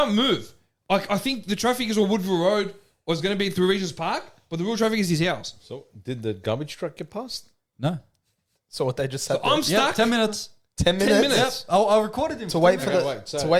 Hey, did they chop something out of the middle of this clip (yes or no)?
no